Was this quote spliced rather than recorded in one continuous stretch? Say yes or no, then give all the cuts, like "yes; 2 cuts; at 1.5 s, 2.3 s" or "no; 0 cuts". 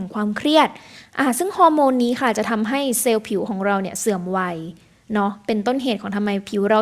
no; 0 cuts